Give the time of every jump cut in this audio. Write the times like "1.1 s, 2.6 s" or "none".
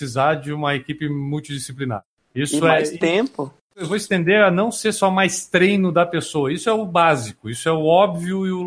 none